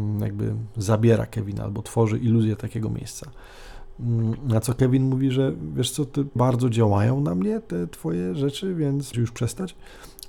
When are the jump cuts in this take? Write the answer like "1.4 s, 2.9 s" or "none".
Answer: 6.4 s, 9.1 s